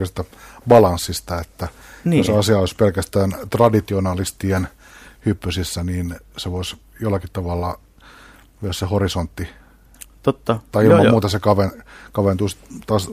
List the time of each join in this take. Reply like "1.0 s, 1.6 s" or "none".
none